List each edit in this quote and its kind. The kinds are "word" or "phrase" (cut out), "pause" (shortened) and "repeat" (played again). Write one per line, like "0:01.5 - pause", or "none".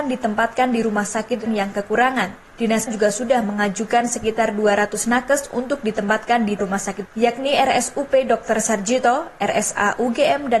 0:01.5 - word
0:02.9 - word
0:06.6 - word
0:07.0 - word